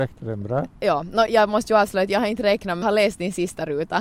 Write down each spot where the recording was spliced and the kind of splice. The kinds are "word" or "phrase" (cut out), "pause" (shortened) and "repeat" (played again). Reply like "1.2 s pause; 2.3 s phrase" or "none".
1.3 s word; 2.8 s word